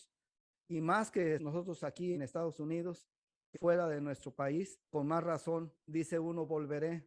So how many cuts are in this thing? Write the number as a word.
five